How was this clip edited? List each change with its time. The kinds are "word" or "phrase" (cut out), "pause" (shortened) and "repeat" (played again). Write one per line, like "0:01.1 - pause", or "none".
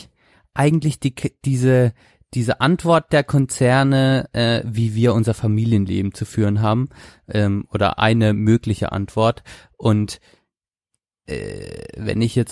none